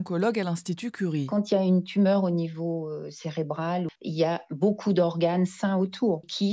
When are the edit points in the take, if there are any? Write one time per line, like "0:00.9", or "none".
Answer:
0:04.0